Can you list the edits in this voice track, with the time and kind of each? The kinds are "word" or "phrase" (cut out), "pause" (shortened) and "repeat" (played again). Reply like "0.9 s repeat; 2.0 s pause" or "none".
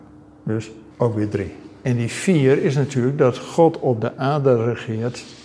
0.9 s pause